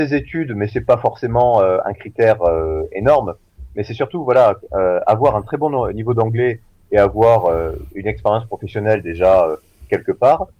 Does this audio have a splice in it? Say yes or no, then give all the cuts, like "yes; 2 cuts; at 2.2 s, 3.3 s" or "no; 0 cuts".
no; 0 cuts